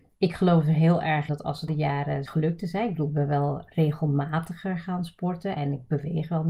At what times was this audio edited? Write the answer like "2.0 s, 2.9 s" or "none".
1.3 s, 1.7 s, 2.3 s